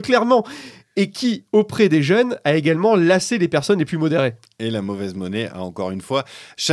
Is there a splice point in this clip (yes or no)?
no